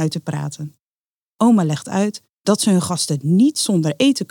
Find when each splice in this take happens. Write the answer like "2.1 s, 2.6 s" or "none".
none